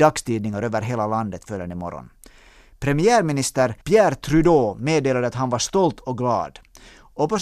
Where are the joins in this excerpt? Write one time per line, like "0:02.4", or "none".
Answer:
0:03.8